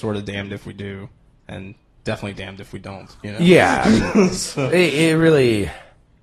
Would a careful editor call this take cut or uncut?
uncut